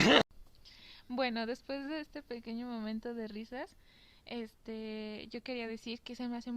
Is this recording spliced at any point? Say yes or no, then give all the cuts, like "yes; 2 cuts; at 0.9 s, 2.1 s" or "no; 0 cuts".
no; 0 cuts